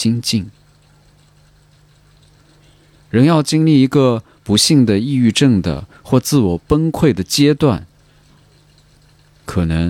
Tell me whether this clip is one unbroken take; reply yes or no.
yes